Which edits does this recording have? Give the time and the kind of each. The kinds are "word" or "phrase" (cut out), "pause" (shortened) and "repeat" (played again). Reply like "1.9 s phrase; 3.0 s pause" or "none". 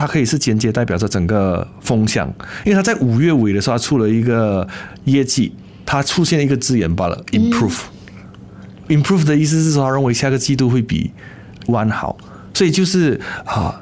11.7 s word